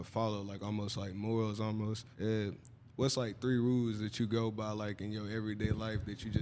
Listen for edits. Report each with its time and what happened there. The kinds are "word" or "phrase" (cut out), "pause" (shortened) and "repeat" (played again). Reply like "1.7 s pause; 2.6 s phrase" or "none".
2.1 s pause